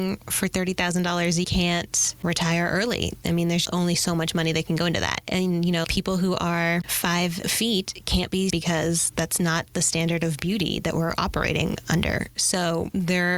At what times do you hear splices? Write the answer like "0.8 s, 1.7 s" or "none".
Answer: 1.4 s, 3.6 s, 5.8 s, 8.5 s